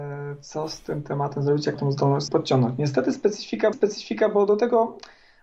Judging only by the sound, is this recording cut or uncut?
cut